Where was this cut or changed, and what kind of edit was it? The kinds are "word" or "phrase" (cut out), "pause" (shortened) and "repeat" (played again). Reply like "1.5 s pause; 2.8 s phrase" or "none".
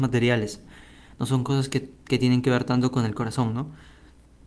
none